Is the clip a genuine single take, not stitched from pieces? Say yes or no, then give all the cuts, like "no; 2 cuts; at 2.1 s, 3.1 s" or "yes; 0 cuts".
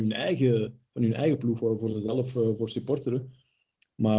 yes; 0 cuts